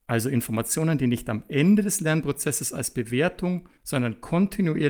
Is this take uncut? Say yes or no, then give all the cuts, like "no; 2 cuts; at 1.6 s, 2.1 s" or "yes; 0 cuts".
no; 1 cut; at 3.8 s